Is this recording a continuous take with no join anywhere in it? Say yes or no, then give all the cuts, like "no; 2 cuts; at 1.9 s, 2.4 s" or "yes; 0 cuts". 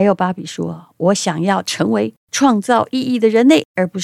no; 1 cut; at 2.2 s